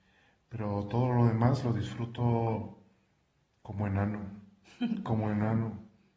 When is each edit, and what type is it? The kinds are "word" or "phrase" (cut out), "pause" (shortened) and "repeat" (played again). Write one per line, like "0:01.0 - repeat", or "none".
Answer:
none